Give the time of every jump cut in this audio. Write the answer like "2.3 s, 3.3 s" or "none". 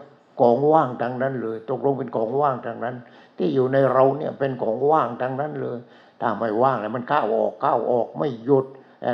none